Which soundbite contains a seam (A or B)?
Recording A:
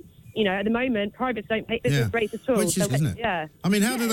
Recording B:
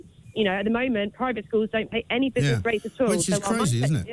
A